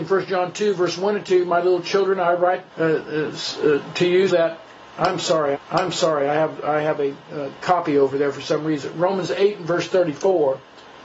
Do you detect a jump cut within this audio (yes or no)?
yes